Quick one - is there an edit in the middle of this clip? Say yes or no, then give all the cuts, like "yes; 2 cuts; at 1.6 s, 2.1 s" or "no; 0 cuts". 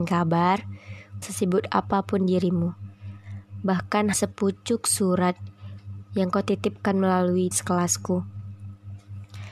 yes; 3 cuts; at 1.2 s, 4.1 s, 7.5 s